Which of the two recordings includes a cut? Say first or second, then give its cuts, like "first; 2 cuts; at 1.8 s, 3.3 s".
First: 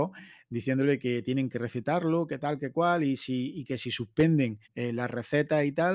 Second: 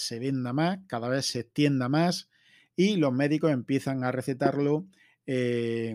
first; 1 cut; at 4.6 s